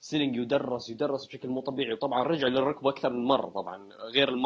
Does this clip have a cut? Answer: no; 0 cuts

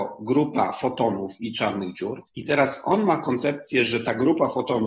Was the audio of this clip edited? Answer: yes; 1 cut; at 2.3 s

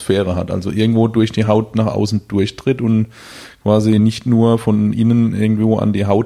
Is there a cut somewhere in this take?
no; 0 cuts

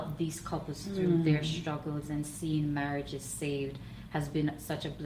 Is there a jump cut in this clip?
no; 0 cuts

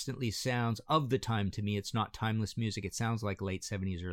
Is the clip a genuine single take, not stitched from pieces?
yes; 0 cuts

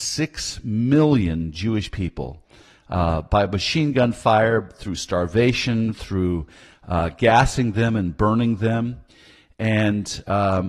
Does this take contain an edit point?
no; 0 cuts

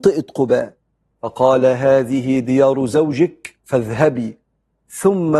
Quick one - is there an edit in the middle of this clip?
yes; 1 cut; at 3.6 s

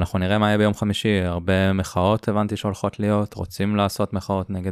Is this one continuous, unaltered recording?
yes; 0 cuts

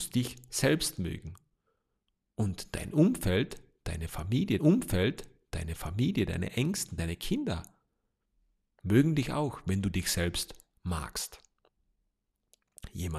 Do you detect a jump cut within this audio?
yes; 1 cut; at 4.6 s

